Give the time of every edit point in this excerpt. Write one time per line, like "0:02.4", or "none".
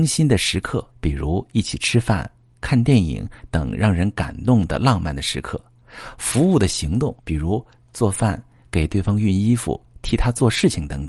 0:00.9
0:07.2